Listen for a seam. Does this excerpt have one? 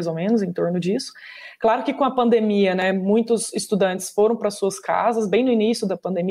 no; 0 cuts

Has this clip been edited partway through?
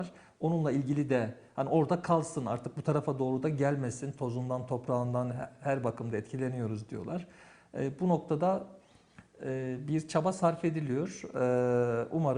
no; 0 cuts

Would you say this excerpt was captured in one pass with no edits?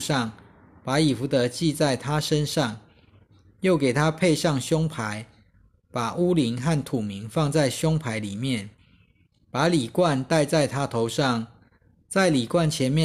yes; 0 cuts

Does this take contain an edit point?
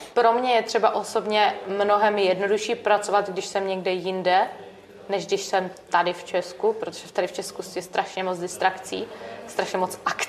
no; 0 cuts

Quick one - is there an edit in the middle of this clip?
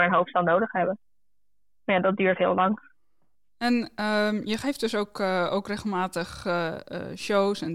no; 0 cuts

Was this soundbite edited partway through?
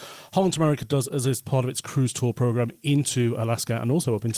no; 0 cuts

